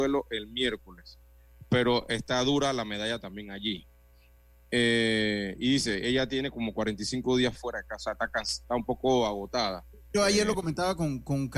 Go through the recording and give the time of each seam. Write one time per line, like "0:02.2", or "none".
none

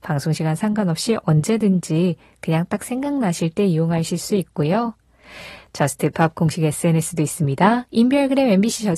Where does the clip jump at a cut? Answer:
none

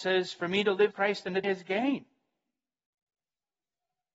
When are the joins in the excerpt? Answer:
0:00.9
0:01.4

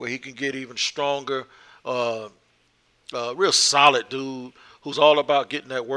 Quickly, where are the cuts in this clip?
none

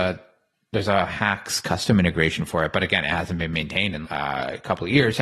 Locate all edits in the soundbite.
0:04.0

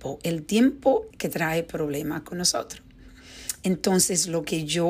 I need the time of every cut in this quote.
0:01.1

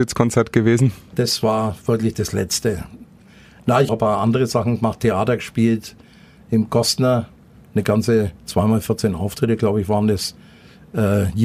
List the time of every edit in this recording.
0:03.9
0:08.4

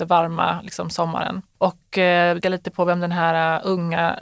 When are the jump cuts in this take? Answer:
0:02.4

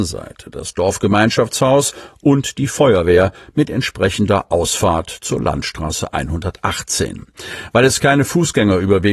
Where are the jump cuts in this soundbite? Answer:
none

